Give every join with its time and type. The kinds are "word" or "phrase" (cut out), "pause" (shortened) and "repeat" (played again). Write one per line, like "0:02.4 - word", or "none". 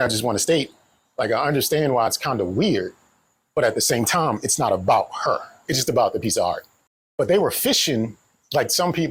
0:05.7 - word